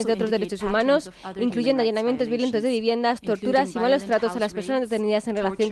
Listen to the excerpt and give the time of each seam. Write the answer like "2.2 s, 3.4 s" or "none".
none